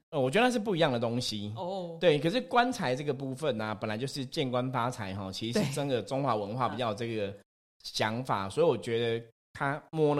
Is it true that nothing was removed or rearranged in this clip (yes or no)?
yes